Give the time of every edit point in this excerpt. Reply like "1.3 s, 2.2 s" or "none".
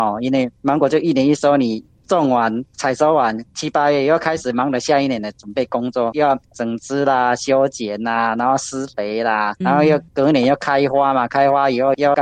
9.6 s